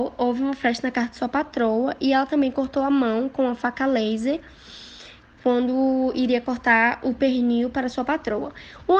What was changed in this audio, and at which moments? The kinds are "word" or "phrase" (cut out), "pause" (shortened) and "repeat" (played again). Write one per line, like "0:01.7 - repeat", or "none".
none